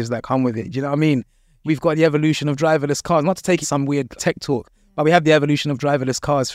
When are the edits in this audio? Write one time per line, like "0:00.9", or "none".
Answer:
0:01.7
0:03.6
0:04.2